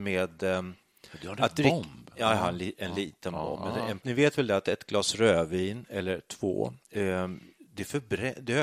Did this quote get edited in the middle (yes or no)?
yes